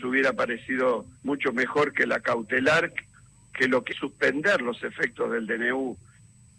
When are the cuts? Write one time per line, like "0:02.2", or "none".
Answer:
0:01.2
0:03.9